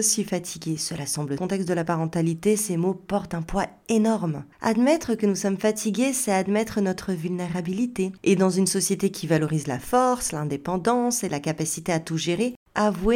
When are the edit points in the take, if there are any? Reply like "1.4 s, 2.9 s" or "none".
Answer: 1.4 s, 4.5 s, 8.2 s

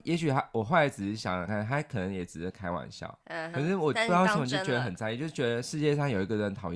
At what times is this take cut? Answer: 3.5 s

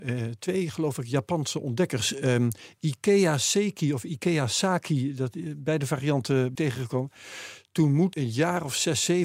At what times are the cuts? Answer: 6.5 s, 8.1 s

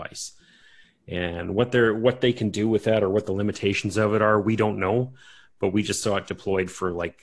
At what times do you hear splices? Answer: none

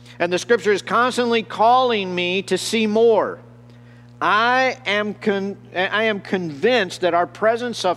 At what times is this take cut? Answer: none

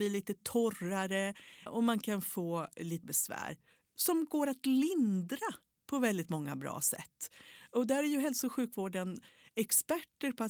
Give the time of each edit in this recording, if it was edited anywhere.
1.7 s, 3.0 s

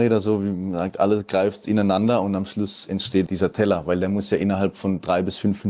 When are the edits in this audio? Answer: 3.3 s

